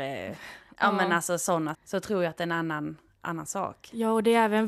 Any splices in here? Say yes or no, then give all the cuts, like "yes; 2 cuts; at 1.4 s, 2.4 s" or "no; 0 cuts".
yes; 1 cut; at 1.7 s